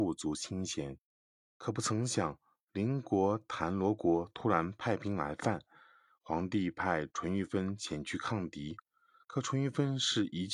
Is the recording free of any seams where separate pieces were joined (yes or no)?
yes